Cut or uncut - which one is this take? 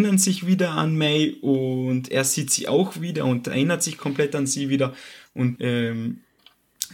cut